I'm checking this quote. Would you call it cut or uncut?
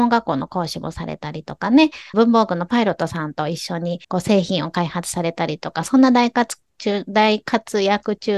cut